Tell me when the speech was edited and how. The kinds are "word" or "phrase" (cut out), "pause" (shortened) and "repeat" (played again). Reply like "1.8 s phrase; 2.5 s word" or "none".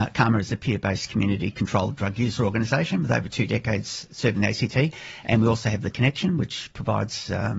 none